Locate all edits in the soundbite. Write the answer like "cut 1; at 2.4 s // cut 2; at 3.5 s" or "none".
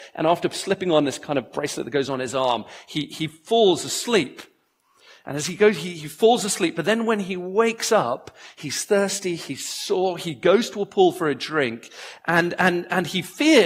none